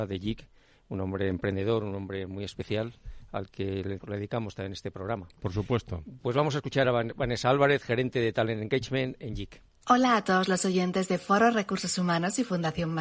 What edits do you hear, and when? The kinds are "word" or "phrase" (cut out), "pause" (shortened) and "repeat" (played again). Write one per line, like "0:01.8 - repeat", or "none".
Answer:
0:04.0 - word
0:09.7 - pause